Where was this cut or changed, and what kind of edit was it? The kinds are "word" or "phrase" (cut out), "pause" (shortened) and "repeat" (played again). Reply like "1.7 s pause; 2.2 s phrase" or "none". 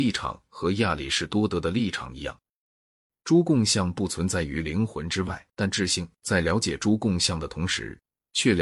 5.5 s pause